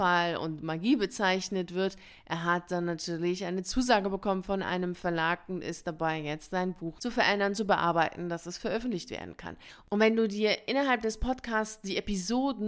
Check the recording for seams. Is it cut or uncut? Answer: cut